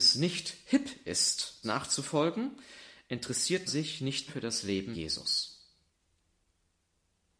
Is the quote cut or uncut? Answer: cut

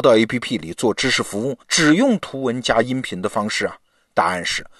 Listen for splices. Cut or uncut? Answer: cut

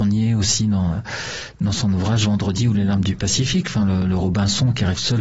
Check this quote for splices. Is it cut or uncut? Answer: uncut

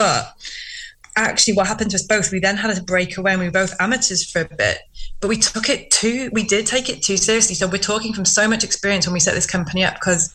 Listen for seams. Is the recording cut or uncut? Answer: uncut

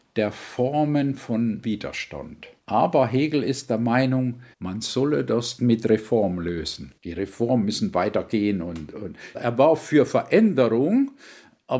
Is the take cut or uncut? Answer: cut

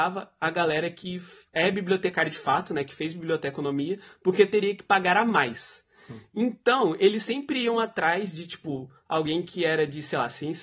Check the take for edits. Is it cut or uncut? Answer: uncut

